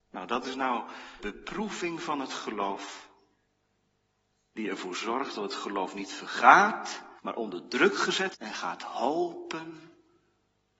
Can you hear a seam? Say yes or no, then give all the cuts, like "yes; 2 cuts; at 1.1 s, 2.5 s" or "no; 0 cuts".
yes; 3 cuts; at 1.2 s, 7.2 s, 8.3 s